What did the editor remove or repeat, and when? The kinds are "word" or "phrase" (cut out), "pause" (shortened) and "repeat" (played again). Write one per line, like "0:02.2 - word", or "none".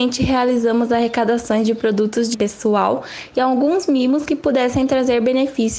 0:02.3 - word